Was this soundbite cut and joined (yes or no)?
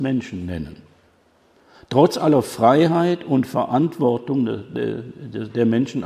no